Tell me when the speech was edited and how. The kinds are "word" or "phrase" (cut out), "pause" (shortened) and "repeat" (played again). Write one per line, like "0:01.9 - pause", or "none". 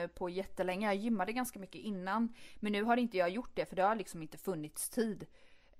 none

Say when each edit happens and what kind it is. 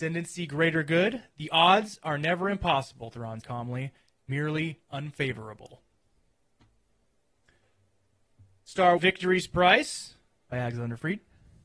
0:03.4 - word
0:09.0 - word

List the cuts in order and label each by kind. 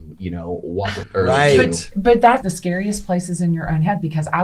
0:01.0 - word
0:02.4 - phrase

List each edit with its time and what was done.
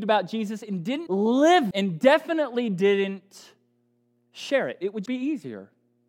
0:01.1 - word
0:01.7 - word
0:05.1 - word

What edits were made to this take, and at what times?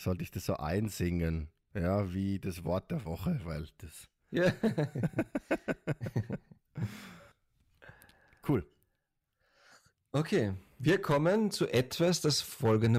0:07.3 - pause

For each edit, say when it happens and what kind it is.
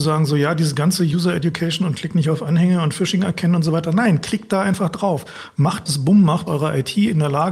0:05.9 - word
0:06.5 - word

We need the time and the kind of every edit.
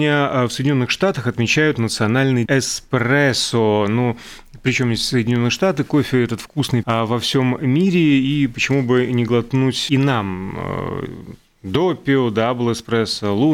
0:02.5 - word
0:06.8 - word
0:09.9 - word

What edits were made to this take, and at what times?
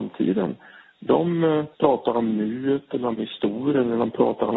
0:01.7 - pause
0:03.2 - phrase

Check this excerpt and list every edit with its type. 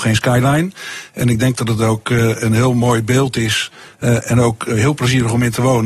none

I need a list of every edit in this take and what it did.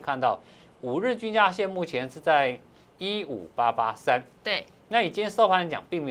none

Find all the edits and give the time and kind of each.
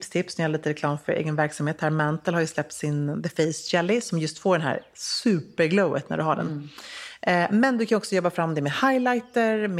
none

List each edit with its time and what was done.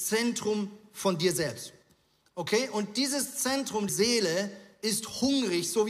0:03.9 - word

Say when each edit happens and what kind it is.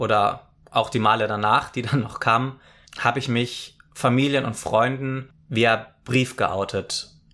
none

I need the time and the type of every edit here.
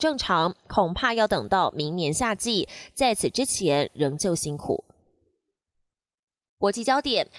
none

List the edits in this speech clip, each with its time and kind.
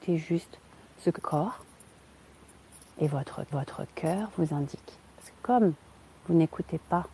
0:01.2 - word
0:03.5 - repeat

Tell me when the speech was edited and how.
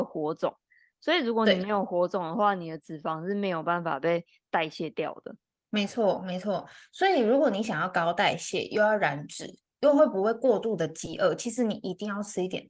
0:05.4 - pause

